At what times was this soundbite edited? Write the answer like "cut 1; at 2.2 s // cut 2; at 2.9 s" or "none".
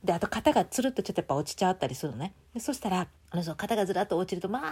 cut 1; at 3.2 s